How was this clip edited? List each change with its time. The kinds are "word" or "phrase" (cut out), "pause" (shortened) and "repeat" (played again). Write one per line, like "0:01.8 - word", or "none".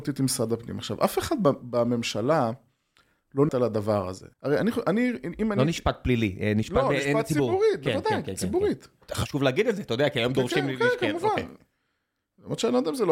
0:03.5 - word
0:04.3 - pause